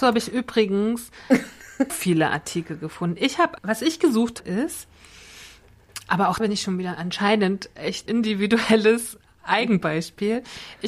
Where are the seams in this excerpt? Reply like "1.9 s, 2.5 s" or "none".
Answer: 1.9 s, 3.6 s, 4.4 s, 6.4 s, 8.1 s